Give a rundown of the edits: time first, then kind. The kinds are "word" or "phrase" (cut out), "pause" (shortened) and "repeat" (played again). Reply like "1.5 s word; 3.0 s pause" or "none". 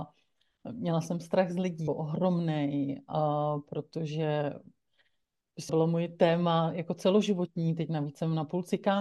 1.9 s word; 5.7 s word